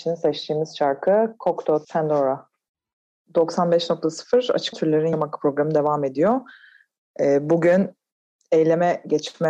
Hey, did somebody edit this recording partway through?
yes; 3 cuts; at 1.8 s, 4.7 s, 5.1 s

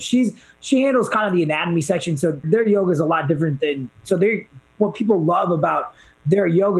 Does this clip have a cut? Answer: yes; 1 cut; at 2.4 s

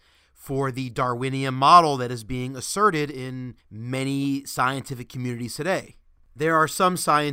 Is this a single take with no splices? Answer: no; 2 cuts; at 3.6 s, 6.3 s

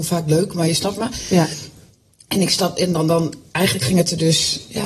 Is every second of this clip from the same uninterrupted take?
yes; 0 cuts

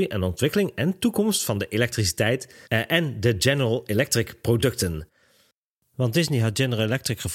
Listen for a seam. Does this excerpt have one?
yes; 1 cut; at 2.6 s

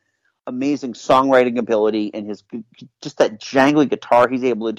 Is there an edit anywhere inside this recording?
no; 0 cuts

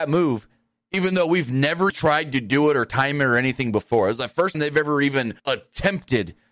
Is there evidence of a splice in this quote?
yes; 3 cuts; at 1.9 s, 4.5 s, 5.4 s

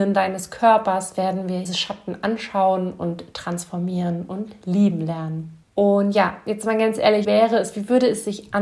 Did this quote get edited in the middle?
yes; 3 cuts; at 1.7 s, 5.6 s, 7.2 s

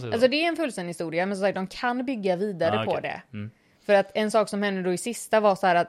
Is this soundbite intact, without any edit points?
yes; 0 cuts

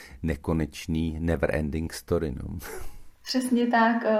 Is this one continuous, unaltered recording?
yes; 0 cuts

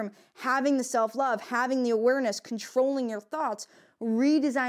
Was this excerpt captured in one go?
yes; 0 cuts

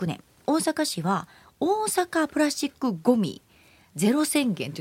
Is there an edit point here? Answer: no; 0 cuts

